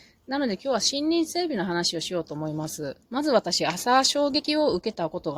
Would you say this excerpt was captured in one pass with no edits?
no; 1 cut; at 3.0 s

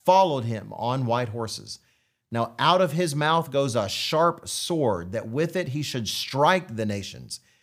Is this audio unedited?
yes; 0 cuts

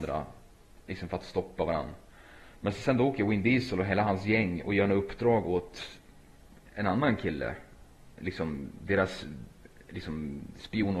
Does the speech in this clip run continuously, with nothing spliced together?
yes; 0 cuts

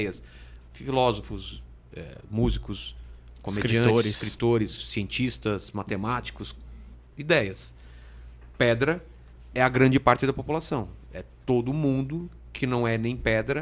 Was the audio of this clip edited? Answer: no; 0 cuts

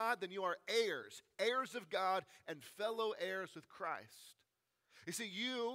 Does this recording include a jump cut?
no; 0 cuts

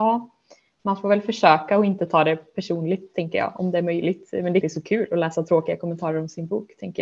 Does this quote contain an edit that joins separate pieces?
yes; 1 cut; at 4.6 s

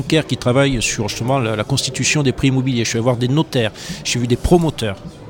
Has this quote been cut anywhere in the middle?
no; 0 cuts

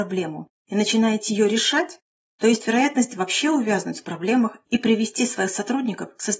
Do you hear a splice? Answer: no; 0 cuts

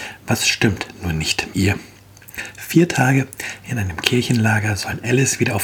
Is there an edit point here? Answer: yes; 1 cut; at 1.5 s

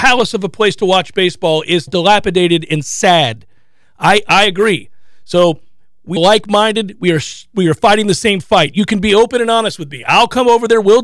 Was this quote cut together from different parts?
yes; 2 cuts; at 1.9 s, 6.2 s

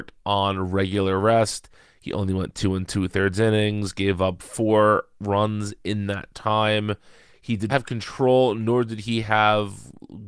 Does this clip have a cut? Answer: yes; 1 cut; at 7.7 s

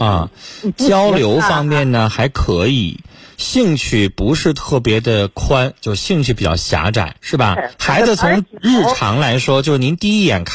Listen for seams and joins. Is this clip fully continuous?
no; 2 cuts; at 7.2 s, 7.7 s

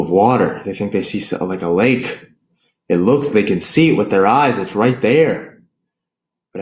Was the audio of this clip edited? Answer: no; 0 cuts

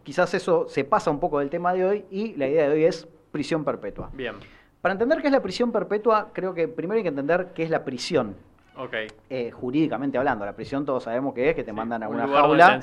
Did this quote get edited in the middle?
no; 0 cuts

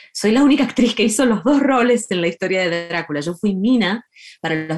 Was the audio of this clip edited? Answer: no; 0 cuts

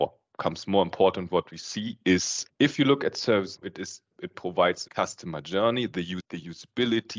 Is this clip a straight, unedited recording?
no; 3 cuts; at 3.6 s, 4.1 s, 4.9 s

